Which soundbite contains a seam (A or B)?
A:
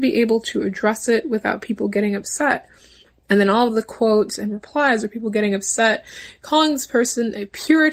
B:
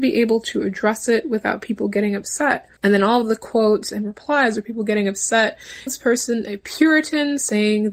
B